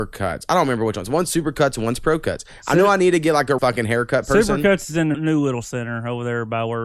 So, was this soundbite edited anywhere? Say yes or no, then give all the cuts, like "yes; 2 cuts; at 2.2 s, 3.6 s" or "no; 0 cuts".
yes; 2 cuts; at 3.6 s, 5.1 s